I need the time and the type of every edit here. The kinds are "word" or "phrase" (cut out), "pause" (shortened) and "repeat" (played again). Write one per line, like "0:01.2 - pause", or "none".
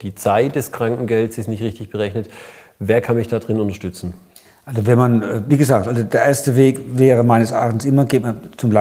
none

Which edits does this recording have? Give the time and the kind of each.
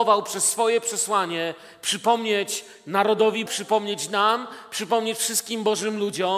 0:03.5 - word

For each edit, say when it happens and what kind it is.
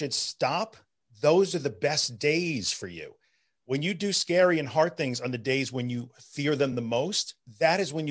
none

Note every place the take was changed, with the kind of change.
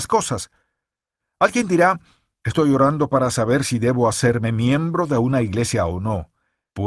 none

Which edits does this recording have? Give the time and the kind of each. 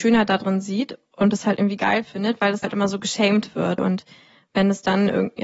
0:02.6 - word
0:03.8 - word

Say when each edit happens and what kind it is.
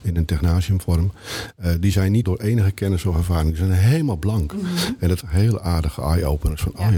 0:02.2 - word
0:05.2 - phrase

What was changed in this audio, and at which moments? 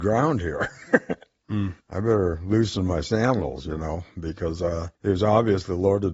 0:01.8 - pause
0:04.9 - pause

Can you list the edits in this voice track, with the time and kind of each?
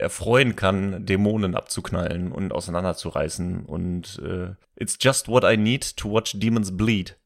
0:04.6 - pause

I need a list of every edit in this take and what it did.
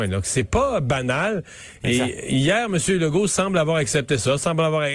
none

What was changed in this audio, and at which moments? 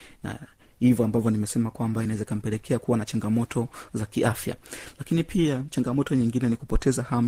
none

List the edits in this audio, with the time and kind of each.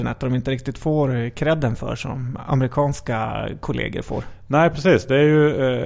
none

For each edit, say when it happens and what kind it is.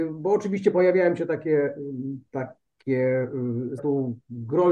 0:03.8 - phrase

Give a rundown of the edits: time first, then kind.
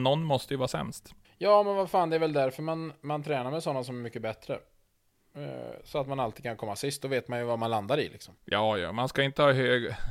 0:01.2 - pause
0:08.4 - pause

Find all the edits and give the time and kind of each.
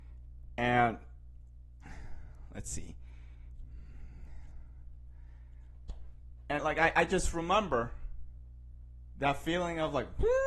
0:06.6 - word

